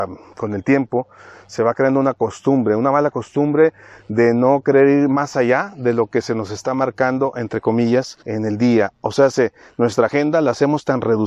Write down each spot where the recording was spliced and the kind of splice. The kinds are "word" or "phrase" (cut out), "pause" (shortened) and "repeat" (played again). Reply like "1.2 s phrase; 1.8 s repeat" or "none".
8.2 s pause